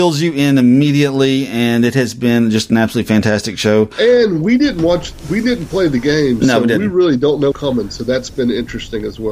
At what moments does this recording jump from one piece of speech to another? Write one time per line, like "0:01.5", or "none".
0:07.5